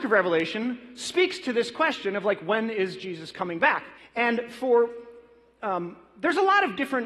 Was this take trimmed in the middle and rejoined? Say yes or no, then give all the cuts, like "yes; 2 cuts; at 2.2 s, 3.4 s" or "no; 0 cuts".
yes; 1 cut; at 4.0 s